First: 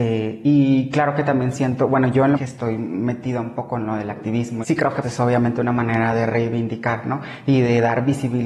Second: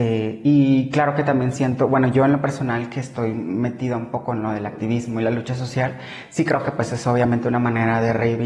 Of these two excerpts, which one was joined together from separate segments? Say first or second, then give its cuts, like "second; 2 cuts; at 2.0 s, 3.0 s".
first; 3 cuts; at 2.4 s, 4.6 s, 5.0 s